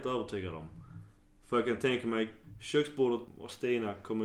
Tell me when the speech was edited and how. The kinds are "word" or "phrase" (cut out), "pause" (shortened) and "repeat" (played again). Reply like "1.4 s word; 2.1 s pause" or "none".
none